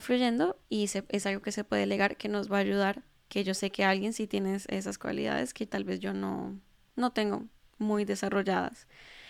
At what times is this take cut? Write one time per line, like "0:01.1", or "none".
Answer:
none